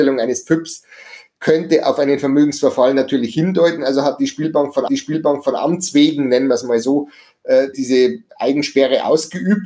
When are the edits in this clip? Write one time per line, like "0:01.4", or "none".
0:04.9
0:07.7